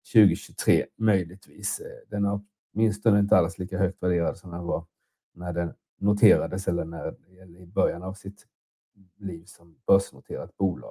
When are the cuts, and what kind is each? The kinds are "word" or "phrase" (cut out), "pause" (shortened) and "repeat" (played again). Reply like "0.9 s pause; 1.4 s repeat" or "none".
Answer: none